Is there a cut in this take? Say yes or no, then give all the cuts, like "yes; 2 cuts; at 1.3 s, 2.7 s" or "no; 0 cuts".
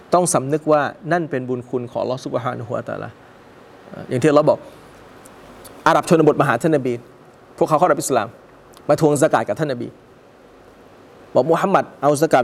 no; 0 cuts